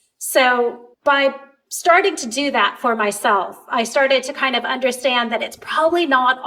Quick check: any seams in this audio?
yes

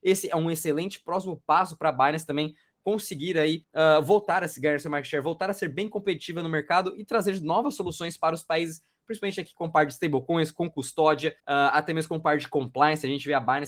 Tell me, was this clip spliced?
yes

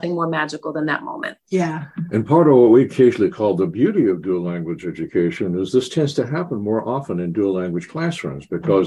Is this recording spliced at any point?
yes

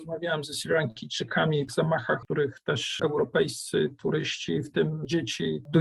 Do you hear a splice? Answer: yes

